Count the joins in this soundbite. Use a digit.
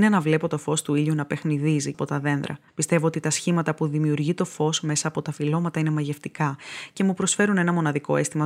2